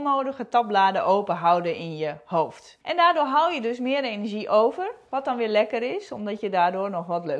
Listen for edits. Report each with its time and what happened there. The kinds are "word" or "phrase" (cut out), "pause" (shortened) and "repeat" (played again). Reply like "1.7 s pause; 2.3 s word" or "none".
2.8 s pause